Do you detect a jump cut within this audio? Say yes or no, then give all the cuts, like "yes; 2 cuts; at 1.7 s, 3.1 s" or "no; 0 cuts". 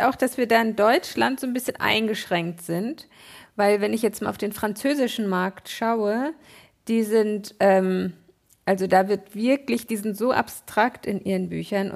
no; 0 cuts